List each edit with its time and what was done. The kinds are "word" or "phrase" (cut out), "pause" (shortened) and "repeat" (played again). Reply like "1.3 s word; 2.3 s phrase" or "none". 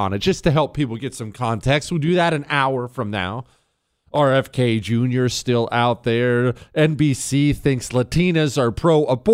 none

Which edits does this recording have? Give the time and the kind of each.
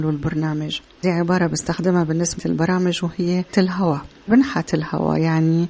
1.0 s phrase; 2.4 s word; 3.5 s word; 4.3 s word

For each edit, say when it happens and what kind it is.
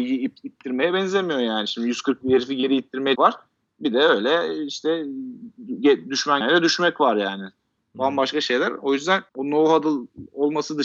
2.2 s word; 3.2 s word; 6.4 s word; 9.3 s pause

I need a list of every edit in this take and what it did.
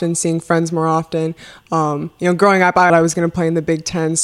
2.9 s phrase

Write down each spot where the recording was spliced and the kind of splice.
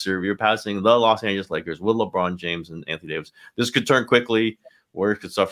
none

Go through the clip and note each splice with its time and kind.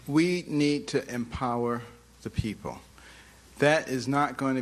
none

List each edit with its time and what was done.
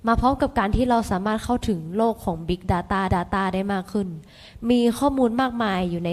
3.1 s repeat

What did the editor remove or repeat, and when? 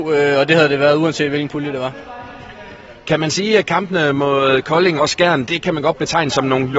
5.0 s word; 5.5 s word

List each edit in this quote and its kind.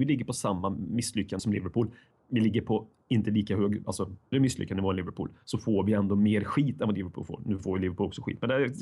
1.4 s word; 4.3 s word

